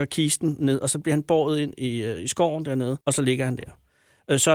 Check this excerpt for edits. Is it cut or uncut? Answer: cut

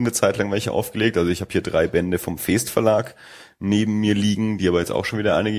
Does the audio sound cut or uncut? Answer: uncut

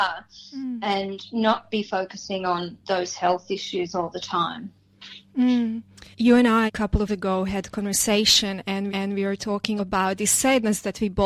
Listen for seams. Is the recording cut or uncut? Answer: cut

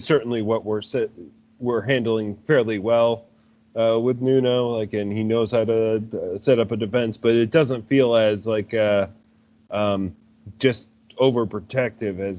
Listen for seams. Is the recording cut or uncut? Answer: uncut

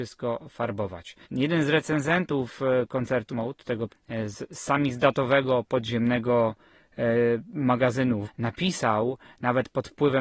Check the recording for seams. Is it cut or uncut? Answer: cut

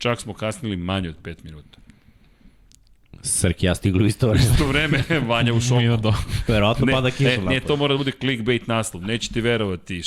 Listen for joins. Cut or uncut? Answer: uncut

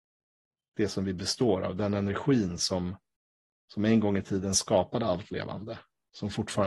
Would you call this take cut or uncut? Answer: uncut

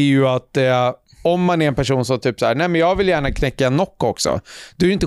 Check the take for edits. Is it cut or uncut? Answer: uncut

